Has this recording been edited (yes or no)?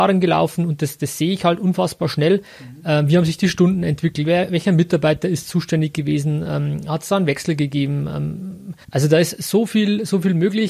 yes